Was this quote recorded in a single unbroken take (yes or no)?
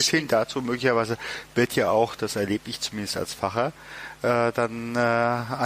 yes